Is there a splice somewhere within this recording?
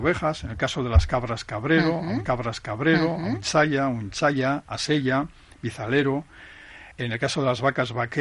yes; 2 cuts; at 2.3 s, 6.9 s

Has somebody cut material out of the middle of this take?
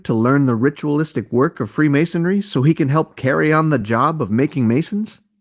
no; 0 cuts

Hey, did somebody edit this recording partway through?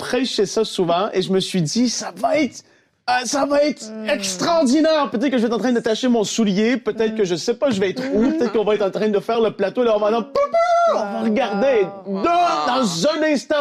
no; 0 cuts

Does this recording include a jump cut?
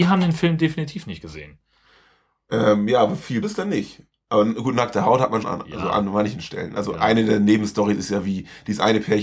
yes; 2 cuts; at 3.4 s, 5.4 s

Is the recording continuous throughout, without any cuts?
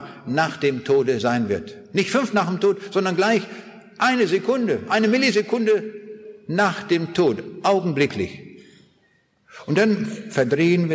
no; 1 cut; at 2.3 s

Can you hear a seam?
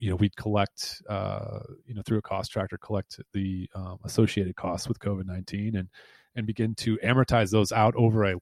no; 0 cuts

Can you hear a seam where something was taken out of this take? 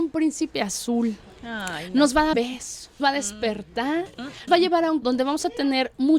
yes; 4 cuts; at 2.3 s, 3.0 s, 4.5 s, 5.0 s

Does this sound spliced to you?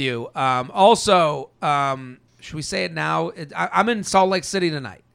yes; 1 cut; at 2.3 s

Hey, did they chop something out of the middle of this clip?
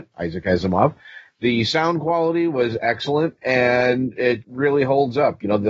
yes; 1 cut; at 4.4 s

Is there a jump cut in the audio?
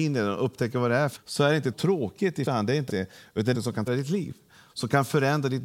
yes; 6 cuts; at 1.2 s, 1.7 s, 2.5 s, 2.9 s, 3.5 s, 3.9 s

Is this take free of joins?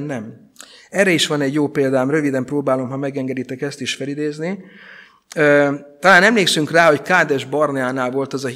yes; 0 cuts

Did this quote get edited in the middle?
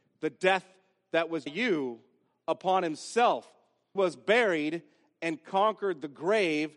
yes; 2 cuts; at 1.5 s, 4.0 s

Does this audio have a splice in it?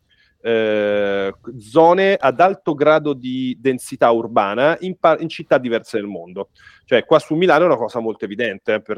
no; 0 cuts

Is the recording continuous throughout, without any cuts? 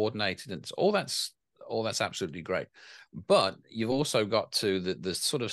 yes; 0 cuts

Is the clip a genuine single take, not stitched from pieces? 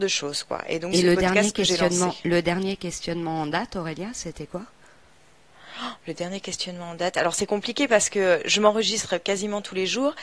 no; 1 cut; at 0.9 s

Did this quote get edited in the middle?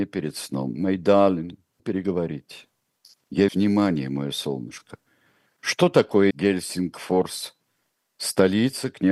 yes; 3 cuts; at 1.8 s, 3.5 s, 6.3 s

